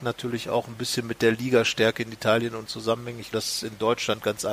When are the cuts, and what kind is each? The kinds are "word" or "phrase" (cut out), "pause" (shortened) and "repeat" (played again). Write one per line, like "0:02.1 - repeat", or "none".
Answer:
0:02.7 - word
0:03.3 - word